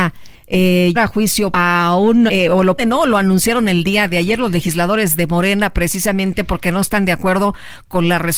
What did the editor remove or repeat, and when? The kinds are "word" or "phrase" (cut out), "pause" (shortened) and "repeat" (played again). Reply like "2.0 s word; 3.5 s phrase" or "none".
1.0 s word; 1.5 s word; 2.3 s word; 2.8 s word